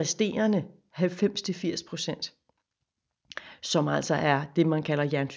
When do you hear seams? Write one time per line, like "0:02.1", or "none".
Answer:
none